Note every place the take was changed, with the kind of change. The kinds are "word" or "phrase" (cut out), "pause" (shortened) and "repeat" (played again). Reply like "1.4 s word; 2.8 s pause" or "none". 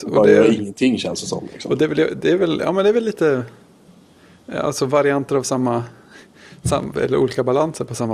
6.9 s word